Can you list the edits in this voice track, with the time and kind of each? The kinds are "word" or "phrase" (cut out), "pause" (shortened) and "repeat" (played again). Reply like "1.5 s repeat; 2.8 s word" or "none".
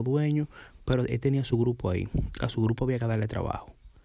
none